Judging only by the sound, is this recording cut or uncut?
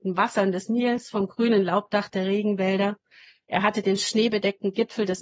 uncut